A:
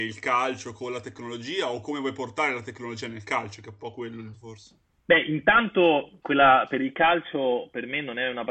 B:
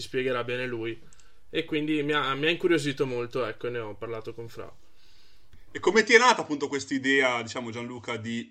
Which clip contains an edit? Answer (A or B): A